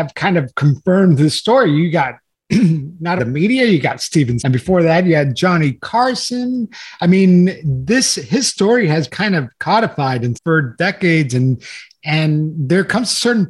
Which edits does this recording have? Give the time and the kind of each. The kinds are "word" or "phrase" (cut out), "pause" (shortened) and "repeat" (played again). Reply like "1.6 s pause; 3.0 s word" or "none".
3.2 s word; 4.4 s word; 9.1 s word; 10.3 s word